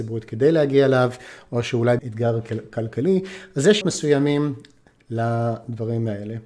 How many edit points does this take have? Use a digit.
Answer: 2